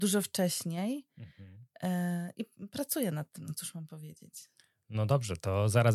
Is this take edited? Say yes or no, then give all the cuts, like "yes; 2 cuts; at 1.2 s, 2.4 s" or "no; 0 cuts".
no; 0 cuts